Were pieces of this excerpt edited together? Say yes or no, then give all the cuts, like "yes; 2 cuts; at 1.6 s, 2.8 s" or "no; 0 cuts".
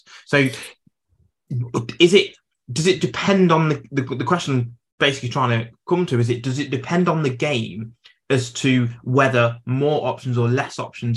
no; 0 cuts